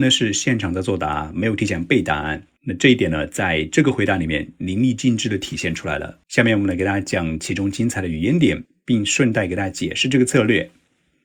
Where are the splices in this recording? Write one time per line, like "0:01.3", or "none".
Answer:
0:02.6
0:06.2

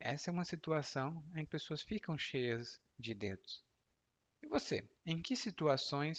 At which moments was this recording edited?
0:01.5
0:02.9
0:05.0

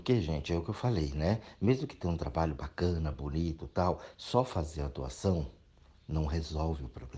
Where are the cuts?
none

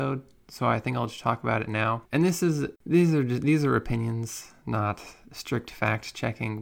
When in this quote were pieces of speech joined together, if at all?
0:02.0
0:02.8

